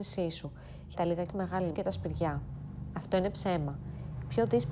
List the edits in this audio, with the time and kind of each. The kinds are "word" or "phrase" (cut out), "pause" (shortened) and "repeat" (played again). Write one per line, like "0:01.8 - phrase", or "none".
0:00.9 - phrase
0:01.3 - word
0:01.7 - word